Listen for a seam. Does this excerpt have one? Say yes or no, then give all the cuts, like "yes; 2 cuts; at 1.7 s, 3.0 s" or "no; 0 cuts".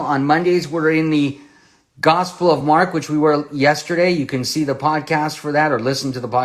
no; 0 cuts